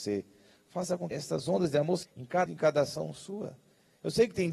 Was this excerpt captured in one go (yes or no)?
no